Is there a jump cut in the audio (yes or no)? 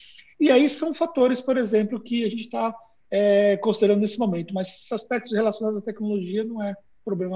no